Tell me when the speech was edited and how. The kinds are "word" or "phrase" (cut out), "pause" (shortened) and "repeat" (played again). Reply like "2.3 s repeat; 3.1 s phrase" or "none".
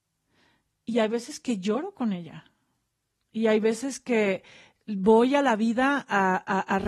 none